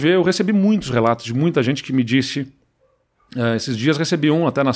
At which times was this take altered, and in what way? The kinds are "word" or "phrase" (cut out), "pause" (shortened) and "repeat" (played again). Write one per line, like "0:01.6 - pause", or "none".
none